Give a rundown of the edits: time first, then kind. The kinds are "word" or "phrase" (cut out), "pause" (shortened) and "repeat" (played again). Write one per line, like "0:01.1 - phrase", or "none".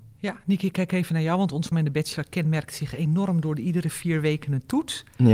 0:01.7 - word